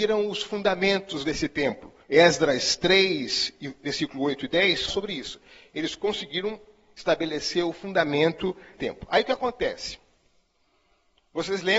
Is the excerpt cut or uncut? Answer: cut